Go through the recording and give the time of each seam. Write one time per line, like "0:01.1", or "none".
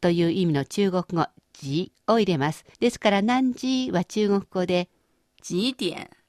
0:02.7

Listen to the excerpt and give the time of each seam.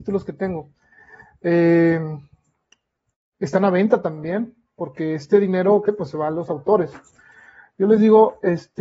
0:05.8

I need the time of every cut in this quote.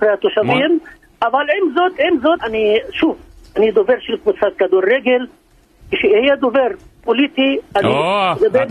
0:02.4

